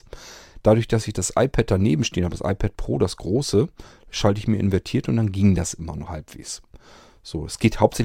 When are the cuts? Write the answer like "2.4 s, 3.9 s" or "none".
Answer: 6.1 s